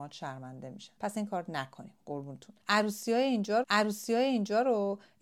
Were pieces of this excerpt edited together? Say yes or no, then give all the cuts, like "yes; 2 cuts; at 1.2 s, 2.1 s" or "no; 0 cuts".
yes; 2 cuts; at 1.0 s, 3.6 s